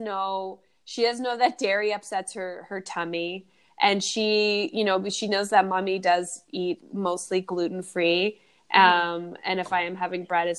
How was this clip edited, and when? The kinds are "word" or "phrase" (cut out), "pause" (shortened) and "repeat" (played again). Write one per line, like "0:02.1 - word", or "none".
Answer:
0:06.8 - word